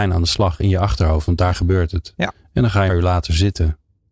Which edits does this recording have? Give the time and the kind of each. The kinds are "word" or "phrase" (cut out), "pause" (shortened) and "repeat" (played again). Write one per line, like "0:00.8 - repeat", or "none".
0:02.9 - phrase